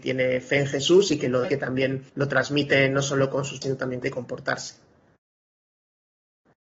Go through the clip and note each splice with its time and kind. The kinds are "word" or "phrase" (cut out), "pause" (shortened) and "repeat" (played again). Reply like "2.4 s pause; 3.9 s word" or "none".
1.4 s word; 2.1 s pause; 3.6 s word; 4.0 s phrase